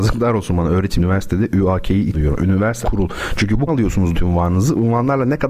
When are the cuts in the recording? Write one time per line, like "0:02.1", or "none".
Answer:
0:01.0
0:02.1
0:02.8
0:03.7
0:04.1